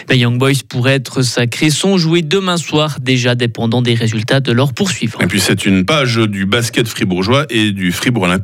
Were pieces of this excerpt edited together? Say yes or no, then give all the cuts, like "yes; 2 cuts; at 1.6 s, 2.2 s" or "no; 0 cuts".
no; 0 cuts